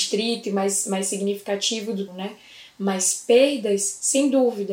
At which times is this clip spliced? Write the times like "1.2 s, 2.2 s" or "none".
2.1 s